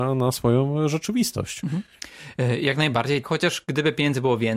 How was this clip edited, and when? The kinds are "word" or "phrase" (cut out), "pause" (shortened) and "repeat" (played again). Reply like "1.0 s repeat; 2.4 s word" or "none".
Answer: 3.2 s word